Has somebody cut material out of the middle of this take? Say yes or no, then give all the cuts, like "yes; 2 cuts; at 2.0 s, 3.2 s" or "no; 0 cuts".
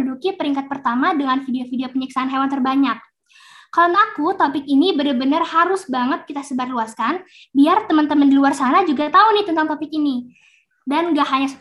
yes; 1 cut; at 3.9 s